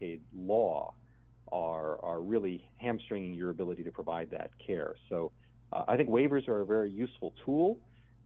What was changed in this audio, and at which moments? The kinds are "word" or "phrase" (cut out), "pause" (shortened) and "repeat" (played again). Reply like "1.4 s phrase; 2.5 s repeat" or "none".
none